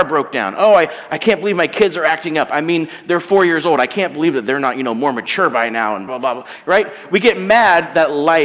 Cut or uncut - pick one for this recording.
cut